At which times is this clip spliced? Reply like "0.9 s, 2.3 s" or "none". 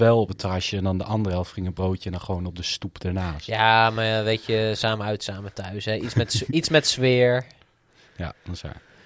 none